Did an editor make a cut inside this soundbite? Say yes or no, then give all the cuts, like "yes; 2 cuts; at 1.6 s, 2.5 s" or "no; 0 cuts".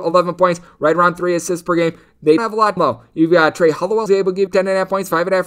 yes; 4 cuts; at 2.4 s, 2.8 s, 4.1 s, 4.5 s